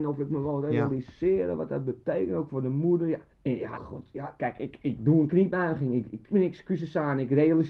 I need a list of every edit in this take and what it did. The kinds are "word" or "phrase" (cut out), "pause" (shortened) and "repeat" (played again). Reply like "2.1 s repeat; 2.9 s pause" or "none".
3.3 s pause; 3.7 s phrase; 6.3 s phrase